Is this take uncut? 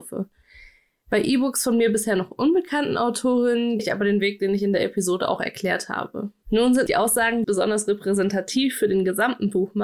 no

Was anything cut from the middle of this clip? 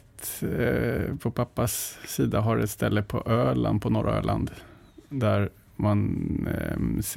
no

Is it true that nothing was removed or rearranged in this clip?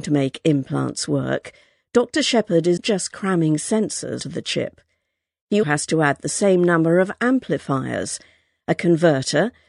no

